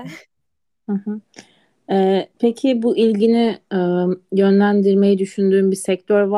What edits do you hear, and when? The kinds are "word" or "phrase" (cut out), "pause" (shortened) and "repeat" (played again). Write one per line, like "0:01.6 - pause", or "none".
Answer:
0:02.3 - pause